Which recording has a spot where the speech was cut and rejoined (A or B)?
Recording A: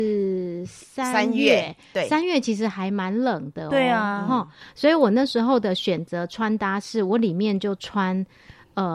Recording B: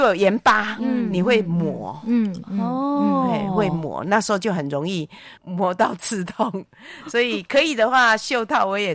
B